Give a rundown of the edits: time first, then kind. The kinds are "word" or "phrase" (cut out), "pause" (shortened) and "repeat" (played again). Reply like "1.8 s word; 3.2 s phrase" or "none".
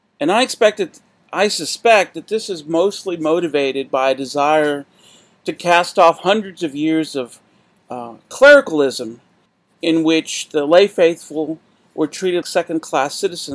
12.4 s word